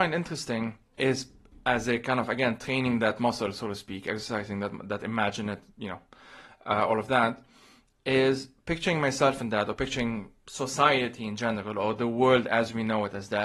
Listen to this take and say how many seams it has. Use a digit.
0